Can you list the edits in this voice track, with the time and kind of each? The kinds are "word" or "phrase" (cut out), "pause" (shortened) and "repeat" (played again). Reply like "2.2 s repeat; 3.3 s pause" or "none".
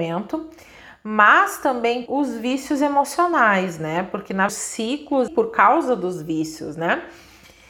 2.1 s word; 4.5 s word; 5.3 s word